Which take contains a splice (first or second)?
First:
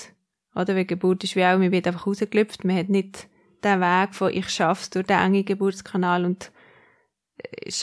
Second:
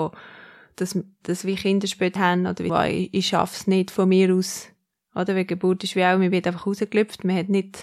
second